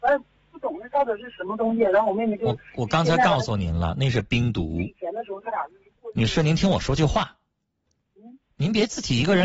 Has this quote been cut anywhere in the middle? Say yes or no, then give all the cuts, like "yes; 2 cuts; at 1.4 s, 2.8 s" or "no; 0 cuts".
no; 0 cuts